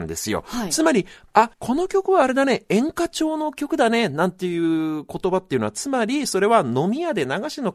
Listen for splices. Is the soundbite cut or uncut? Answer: cut